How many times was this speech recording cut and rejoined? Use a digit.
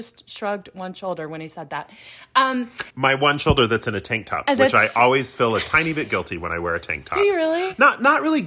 1